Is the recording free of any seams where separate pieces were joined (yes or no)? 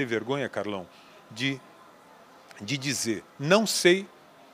yes